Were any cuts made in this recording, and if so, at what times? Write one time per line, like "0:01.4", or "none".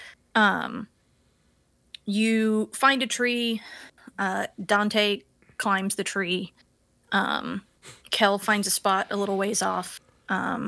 none